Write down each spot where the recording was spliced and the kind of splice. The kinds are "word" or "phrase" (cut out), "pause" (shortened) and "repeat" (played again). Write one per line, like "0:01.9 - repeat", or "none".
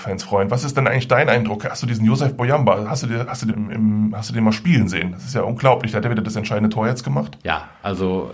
0:03.5 - word